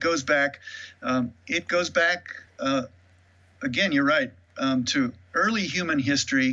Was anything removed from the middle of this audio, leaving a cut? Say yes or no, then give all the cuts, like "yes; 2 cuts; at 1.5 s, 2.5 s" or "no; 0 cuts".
no; 0 cuts